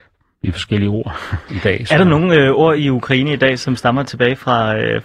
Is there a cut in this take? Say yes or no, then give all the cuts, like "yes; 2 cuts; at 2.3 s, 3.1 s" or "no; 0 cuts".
no; 0 cuts